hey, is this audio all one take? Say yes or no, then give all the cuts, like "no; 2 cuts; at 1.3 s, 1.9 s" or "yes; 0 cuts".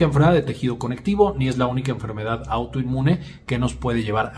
yes; 0 cuts